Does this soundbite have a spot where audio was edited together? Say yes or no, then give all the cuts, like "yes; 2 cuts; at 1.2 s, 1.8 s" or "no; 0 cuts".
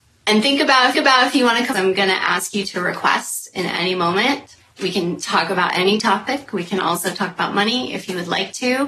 yes; 2 cuts; at 0.9 s, 1.7 s